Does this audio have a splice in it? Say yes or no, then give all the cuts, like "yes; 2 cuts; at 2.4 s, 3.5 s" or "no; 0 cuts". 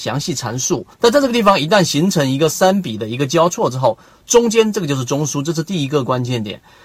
yes; 1 cut; at 0.9 s